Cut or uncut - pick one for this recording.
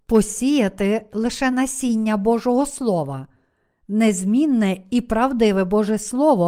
uncut